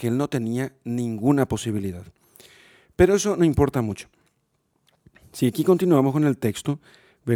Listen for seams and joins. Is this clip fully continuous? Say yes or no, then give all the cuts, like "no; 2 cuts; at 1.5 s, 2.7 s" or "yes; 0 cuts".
yes; 0 cuts